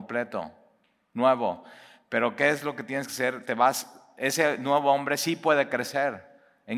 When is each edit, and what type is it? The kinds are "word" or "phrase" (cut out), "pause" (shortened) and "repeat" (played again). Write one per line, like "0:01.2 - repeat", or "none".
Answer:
none